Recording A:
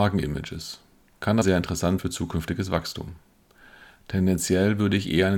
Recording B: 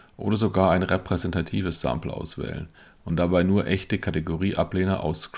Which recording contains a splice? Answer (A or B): A